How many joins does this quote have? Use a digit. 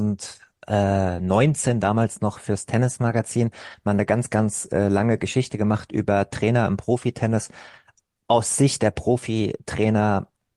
0